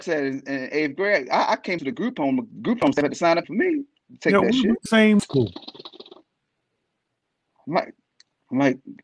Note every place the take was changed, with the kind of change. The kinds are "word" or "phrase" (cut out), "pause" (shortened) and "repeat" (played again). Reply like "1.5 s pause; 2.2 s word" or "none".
1.8 s word; 3.4 s word; 4.9 s word; 5.2 s word